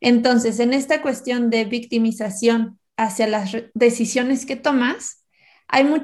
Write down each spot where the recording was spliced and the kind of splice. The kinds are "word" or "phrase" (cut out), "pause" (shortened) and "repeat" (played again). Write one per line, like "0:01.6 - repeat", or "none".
0:02.9 - pause
0:03.7 - pause